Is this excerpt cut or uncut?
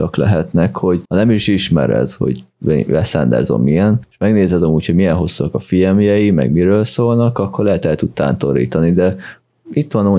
cut